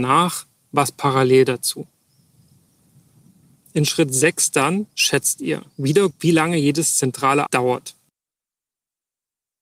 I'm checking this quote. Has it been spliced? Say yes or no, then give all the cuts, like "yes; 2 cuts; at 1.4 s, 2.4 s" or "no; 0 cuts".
yes; 2 cuts; at 6.1 s, 7.5 s